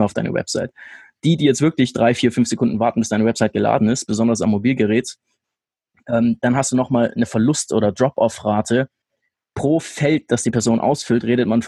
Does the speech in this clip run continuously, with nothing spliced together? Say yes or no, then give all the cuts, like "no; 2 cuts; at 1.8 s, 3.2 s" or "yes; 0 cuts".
yes; 0 cuts